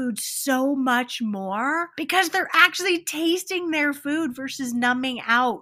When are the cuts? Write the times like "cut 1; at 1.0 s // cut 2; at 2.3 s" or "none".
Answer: none